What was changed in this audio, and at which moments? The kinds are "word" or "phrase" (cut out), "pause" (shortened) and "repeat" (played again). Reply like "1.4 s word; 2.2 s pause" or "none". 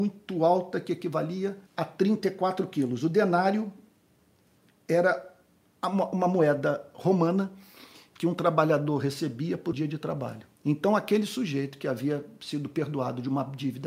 1.7 s pause; 9.7 s word; 10.5 s pause